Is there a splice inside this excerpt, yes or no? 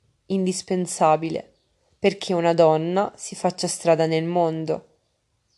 no